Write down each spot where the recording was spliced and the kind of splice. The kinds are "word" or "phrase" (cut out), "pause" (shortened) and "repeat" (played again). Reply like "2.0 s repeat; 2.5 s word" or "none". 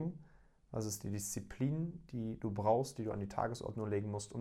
none